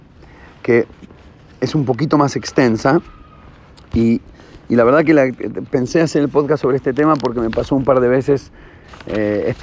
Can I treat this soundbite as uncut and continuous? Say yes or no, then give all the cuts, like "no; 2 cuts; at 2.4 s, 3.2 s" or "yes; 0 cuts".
yes; 0 cuts